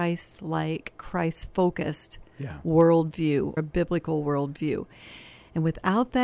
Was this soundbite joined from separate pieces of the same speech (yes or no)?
yes